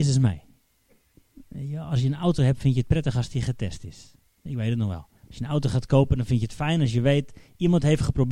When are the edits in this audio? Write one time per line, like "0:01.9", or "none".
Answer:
0:05.2